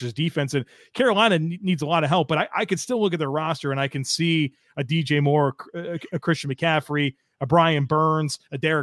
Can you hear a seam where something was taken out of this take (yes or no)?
no